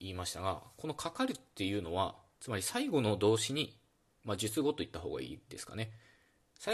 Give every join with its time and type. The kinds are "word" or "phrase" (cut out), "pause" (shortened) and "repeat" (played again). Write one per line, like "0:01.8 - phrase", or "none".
none